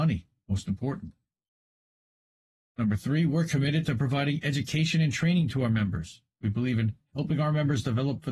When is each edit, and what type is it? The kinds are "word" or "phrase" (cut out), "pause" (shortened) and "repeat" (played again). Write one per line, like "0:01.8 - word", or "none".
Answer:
none